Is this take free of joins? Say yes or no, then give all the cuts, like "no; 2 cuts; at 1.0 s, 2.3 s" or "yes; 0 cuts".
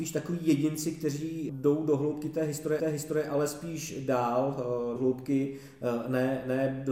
no; 3 cuts; at 1.5 s, 2.8 s, 5.0 s